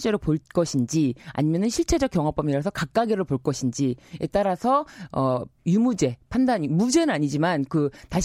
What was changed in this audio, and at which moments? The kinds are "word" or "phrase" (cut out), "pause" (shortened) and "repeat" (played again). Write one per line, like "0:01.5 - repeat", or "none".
0:05.6 - pause